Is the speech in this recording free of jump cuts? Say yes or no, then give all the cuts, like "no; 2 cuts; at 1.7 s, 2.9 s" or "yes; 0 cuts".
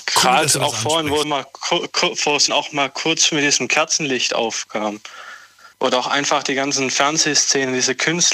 no; 3 cuts; at 1.2 s, 2.5 s, 5.7 s